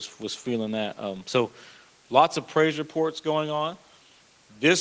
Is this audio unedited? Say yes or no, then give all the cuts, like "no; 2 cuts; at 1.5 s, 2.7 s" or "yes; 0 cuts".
yes; 0 cuts